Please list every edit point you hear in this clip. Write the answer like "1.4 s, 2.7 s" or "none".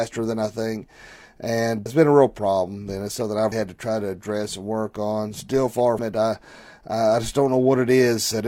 1.9 s, 3.5 s, 6.0 s